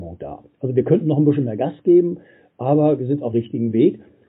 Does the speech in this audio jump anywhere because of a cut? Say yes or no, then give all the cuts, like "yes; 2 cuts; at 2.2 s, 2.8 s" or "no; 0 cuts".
yes; 1 cut; at 3.3 s